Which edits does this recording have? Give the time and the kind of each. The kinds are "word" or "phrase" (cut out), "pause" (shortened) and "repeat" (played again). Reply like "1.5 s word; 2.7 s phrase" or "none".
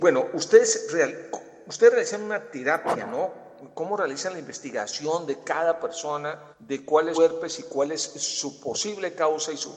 6.5 s pause; 7.1 s word